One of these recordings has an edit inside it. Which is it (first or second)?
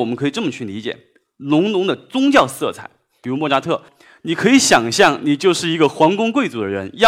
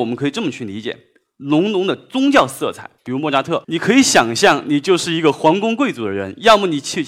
second